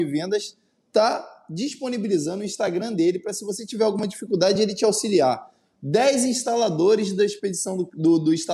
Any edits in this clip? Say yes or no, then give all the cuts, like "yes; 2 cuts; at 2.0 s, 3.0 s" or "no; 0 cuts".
no; 0 cuts